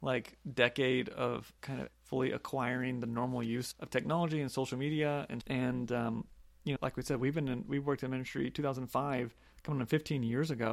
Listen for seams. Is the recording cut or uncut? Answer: cut